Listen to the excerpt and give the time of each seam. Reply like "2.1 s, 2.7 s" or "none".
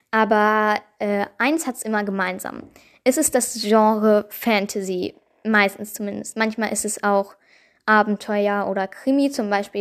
none